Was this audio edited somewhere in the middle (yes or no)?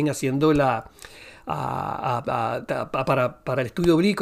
no